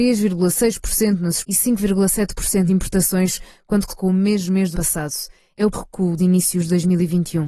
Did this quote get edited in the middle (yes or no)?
yes